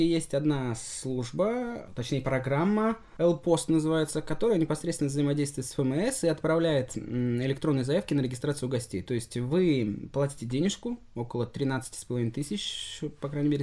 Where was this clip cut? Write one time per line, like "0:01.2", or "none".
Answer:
none